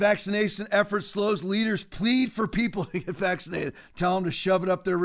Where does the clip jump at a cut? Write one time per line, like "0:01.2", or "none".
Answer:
none